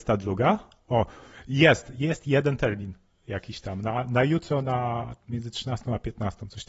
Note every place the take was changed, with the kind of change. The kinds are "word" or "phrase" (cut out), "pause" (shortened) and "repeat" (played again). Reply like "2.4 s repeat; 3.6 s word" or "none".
none

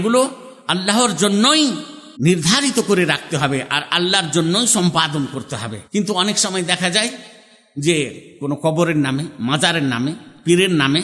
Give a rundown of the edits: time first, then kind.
2.2 s pause; 5.9 s pause

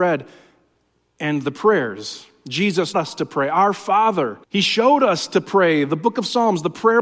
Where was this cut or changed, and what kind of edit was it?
2.9 s word; 4.4 s pause

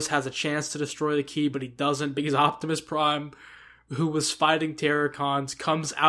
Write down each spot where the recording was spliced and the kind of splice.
none

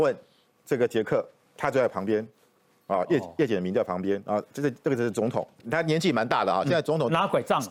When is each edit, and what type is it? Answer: none

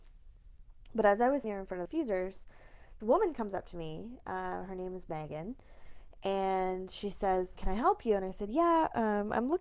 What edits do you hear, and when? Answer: 1.4 s word; 1.9 s word; 3.0 s word; 7.6 s word

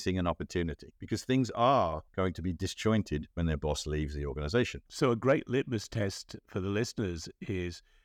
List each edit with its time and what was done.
1.0 s pause; 2.1 s pause; 3.3 s pause; 4.9 s pause

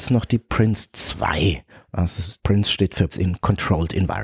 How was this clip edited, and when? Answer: 2.4 s pause; 3.1 s word

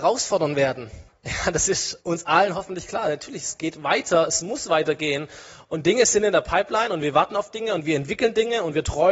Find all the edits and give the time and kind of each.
1.1 s pause; 2.0 s pause

